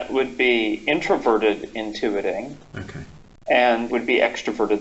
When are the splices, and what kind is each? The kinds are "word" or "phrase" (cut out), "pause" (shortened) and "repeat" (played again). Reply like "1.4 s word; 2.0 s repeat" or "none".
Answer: 3.9 s word